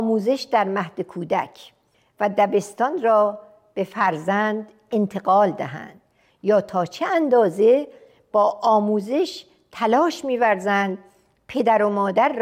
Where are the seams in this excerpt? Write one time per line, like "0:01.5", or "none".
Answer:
none